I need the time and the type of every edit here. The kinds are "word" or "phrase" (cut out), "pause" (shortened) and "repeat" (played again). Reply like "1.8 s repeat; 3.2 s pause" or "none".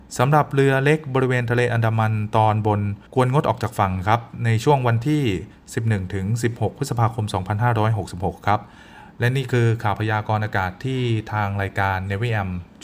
3.1 s pause